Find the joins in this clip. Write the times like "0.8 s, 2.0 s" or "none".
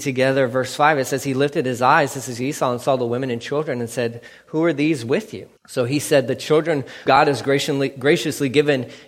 5.6 s, 7.1 s